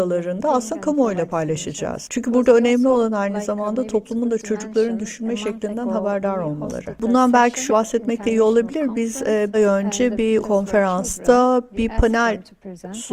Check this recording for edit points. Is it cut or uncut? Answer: cut